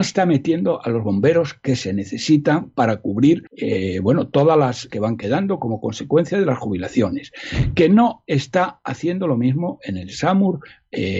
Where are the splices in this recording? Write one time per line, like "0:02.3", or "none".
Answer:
0:03.5
0:04.9

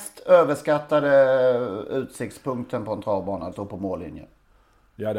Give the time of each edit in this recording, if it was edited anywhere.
0:03.5

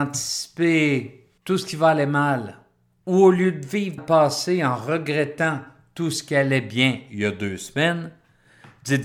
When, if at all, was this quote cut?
0:01.4
0:04.0

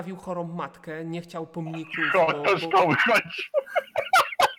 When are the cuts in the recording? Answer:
none

